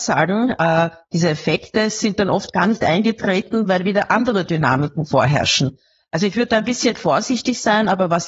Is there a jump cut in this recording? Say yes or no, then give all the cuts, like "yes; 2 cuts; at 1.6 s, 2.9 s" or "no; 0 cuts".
no; 0 cuts